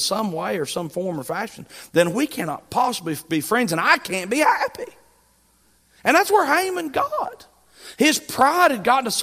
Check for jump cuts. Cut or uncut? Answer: uncut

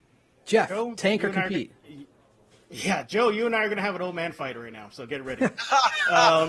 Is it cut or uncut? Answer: uncut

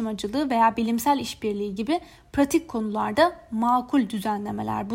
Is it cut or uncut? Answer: uncut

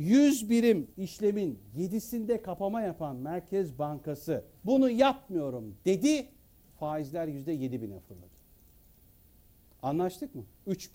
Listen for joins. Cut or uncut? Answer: cut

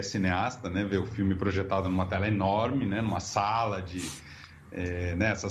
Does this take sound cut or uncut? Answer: uncut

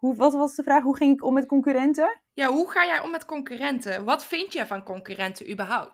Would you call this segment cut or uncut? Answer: cut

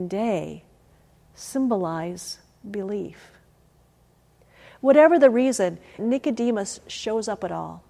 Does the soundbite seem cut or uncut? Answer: cut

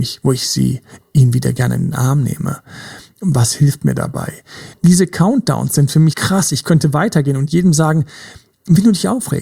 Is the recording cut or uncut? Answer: cut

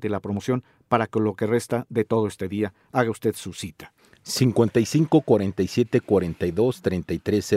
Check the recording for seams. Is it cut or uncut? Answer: uncut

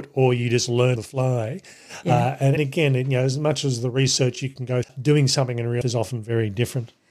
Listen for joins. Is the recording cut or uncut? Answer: cut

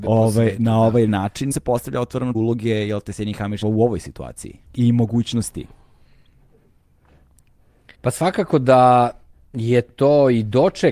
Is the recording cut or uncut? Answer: cut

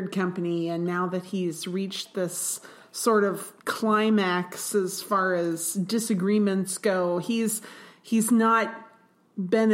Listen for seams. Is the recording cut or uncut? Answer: cut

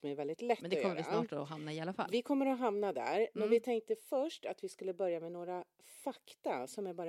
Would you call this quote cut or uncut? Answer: uncut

